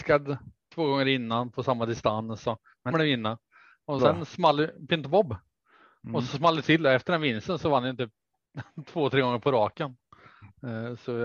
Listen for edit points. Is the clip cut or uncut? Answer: cut